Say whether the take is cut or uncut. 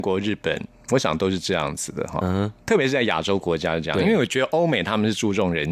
uncut